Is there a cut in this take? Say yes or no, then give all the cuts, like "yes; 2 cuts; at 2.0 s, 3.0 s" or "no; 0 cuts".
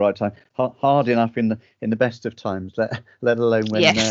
no; 0 cuts